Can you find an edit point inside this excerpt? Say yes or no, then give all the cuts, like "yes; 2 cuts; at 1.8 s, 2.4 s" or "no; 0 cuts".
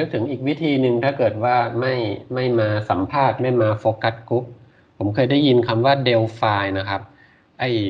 no; 0 cuts